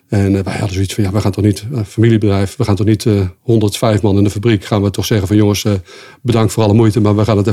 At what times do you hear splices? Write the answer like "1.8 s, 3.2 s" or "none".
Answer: none